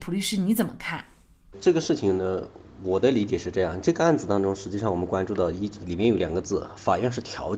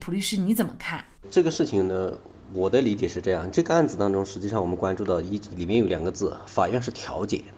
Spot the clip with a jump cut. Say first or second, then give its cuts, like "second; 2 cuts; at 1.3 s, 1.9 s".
second; 1 cut; at 1.2 s